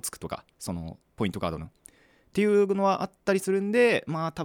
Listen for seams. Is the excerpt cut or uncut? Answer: uncut